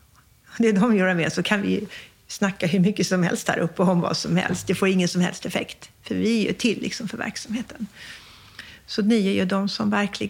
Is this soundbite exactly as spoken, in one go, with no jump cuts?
yes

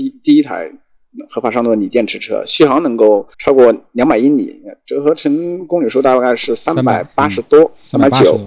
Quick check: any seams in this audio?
yes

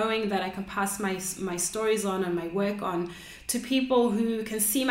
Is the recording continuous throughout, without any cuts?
yes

